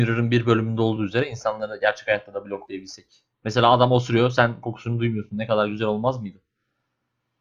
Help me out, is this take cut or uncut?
uncut